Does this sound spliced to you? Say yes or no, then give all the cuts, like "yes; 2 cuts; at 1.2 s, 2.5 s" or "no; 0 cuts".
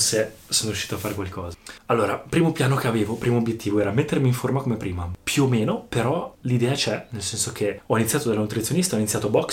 no; 0 cuts